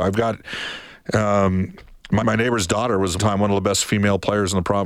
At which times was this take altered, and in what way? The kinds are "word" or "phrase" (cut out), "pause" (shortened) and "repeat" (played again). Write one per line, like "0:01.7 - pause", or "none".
0:02.2 - word
0:03.2 - phrase

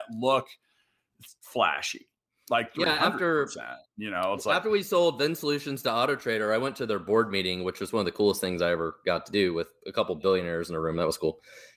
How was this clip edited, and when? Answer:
none

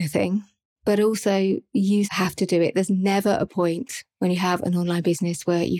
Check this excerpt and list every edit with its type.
0:02.0 - word

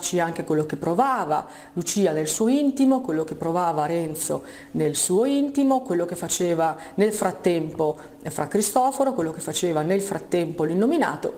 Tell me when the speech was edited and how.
none

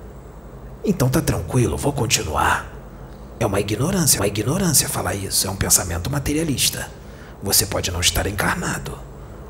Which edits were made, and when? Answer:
0:04.2 - repeat

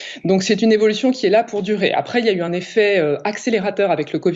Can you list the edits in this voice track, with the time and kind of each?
none

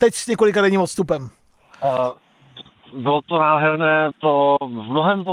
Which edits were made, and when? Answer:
0:04.1 - word

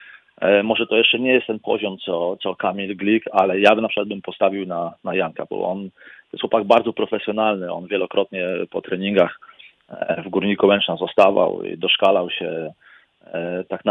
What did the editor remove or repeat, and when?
none

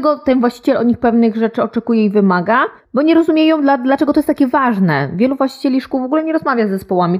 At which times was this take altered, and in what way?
0:02.8 - pause

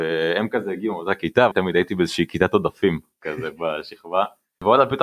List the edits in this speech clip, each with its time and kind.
0:01.5 - word

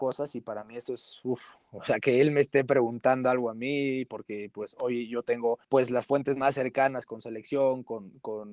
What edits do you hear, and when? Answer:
0:05.6 - pause

